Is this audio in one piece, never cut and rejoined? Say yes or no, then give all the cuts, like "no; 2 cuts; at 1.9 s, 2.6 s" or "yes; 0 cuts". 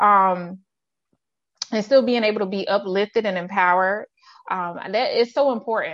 yes; 0 cuts